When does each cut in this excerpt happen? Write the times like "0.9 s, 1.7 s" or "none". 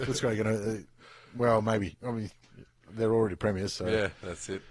none